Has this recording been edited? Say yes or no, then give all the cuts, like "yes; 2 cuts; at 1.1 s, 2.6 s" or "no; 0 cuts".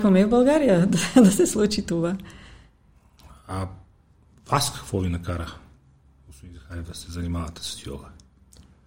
no; 0 cuts